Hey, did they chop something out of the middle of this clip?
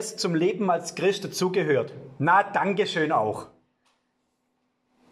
no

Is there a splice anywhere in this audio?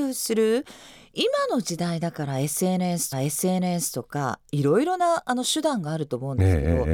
yes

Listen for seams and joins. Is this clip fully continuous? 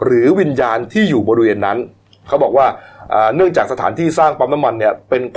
yes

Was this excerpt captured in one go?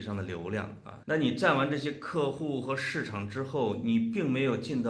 no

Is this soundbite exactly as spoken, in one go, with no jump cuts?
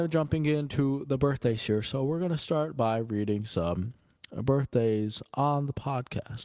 yes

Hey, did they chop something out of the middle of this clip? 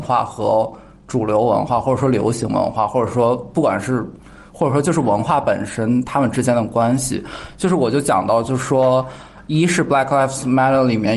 no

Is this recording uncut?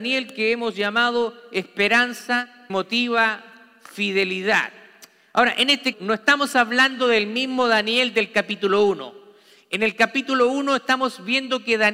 no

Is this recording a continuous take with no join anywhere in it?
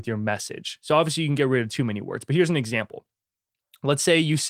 yes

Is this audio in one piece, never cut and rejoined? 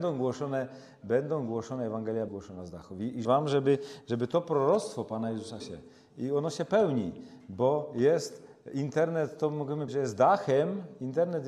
no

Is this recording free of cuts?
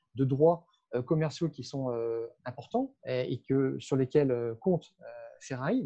no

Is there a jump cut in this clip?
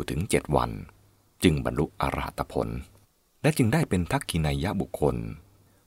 no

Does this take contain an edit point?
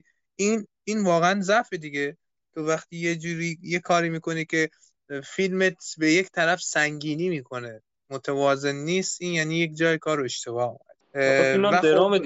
no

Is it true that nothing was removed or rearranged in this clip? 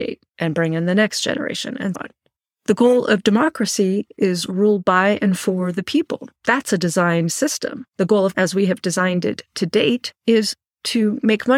no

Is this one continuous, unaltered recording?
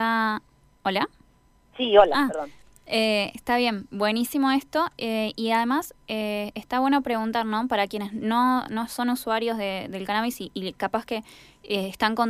yes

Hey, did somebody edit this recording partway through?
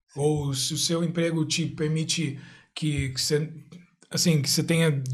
no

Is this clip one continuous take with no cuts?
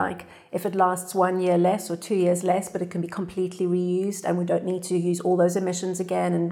yes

